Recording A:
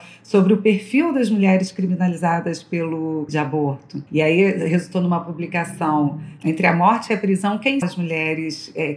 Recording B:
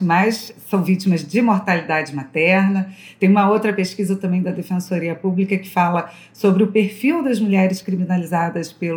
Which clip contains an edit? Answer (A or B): A